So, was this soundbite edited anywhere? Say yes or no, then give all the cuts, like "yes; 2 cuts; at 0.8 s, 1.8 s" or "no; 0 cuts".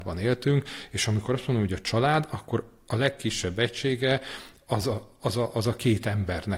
no; 0 cuts